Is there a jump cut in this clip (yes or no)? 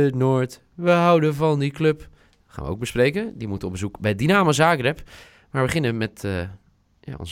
no